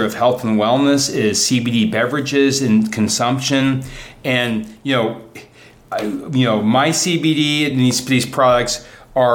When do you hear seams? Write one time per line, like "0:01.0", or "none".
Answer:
none